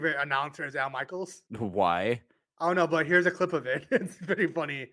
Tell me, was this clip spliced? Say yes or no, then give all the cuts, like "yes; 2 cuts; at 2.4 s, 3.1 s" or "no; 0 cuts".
yes; 1 cut; at 1.5 s